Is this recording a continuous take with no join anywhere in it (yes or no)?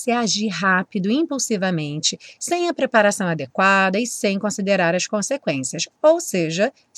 yes